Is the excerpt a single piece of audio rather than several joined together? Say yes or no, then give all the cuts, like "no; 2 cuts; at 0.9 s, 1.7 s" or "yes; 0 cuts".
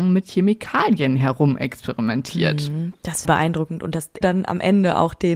no; 2 cuts; at 3.2 s, 4.2 s